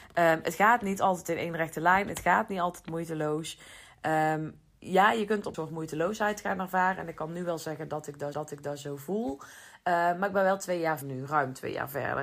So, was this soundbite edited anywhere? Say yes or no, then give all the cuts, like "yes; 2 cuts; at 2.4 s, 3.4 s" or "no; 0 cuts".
yes; 3 cuts; at 5.5 s, 8.3 s, 11.0 s